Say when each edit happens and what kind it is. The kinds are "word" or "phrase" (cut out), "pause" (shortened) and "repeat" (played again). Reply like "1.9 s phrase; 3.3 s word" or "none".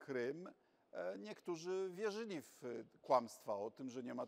none